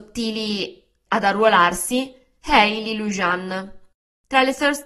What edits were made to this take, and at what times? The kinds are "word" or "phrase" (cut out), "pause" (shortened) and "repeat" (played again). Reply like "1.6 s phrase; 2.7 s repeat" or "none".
1.1 s word